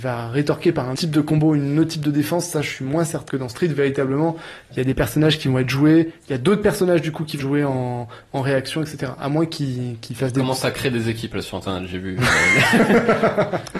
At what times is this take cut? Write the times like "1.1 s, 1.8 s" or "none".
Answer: 0.9 s, 3.3 s, 7.4 s